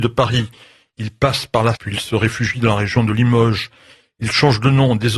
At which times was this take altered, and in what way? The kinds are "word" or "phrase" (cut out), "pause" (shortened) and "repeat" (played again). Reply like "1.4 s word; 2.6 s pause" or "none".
1.7 s word